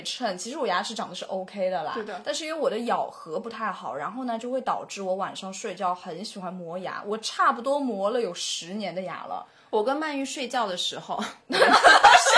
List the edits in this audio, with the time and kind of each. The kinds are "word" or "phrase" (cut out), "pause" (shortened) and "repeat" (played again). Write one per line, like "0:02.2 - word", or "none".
none